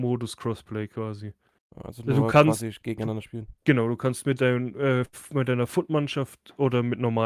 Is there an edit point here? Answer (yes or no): yes